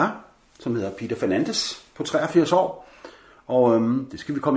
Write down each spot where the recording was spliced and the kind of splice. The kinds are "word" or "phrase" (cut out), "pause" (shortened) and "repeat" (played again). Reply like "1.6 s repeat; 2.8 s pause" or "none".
none